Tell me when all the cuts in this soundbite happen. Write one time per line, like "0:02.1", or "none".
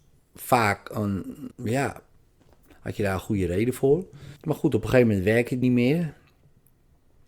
0:01.5
0:04.4
0:05.6